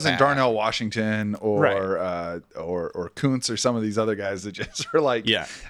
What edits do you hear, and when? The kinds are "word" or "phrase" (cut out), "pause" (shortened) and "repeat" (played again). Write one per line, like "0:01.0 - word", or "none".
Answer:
none